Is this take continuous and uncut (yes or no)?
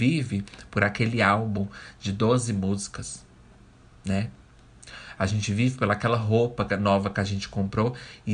yes